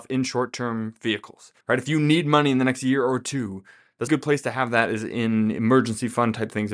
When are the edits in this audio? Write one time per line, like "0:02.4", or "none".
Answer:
0:01.6
0:04.1